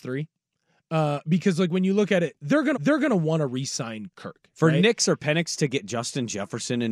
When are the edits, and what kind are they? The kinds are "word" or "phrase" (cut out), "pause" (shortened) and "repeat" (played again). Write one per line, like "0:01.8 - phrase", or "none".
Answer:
0:02.7 - repeat